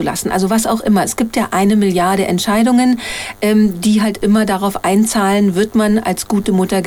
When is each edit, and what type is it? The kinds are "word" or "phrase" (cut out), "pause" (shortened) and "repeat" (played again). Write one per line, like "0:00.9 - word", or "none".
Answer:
none